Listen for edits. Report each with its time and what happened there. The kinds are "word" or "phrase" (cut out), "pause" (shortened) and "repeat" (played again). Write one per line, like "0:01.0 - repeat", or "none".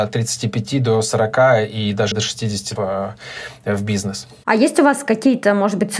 0:02.1 - word
0:02.8 - word